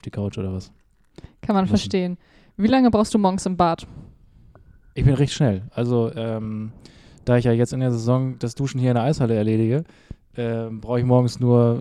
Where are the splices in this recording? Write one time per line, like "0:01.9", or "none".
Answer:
none